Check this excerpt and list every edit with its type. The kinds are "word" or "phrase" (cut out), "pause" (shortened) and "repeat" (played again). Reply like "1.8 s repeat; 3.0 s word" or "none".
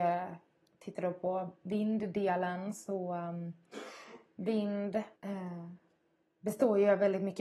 5.2 s pause